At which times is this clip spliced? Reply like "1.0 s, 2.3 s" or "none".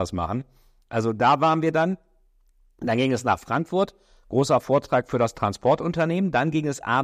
none